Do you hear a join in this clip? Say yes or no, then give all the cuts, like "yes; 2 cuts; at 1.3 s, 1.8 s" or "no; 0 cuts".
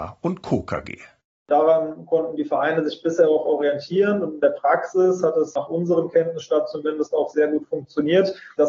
no; 0 cuts